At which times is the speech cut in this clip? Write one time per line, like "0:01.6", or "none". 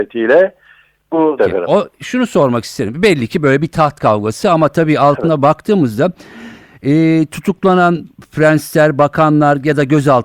0:01.4

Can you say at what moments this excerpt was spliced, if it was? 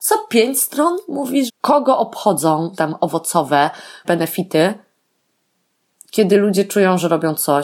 0:01.5
0:02.8
0:04.0

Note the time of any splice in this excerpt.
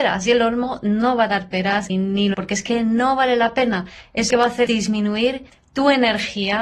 0:01.9
0:02.3
0:04.3
0:04.7
0:05.5

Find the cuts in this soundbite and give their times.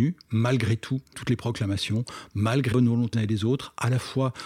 0:01.1
0:02.7
0:03.1

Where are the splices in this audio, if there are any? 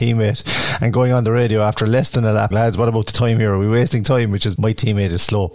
0:02.5
0:04.6

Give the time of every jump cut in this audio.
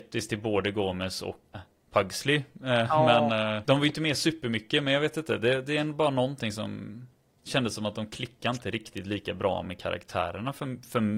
0:01.5
0:03.6

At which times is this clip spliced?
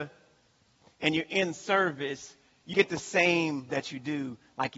0:02.7
0:03.7

